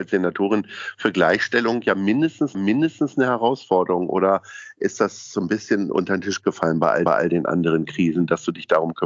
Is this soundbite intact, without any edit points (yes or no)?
no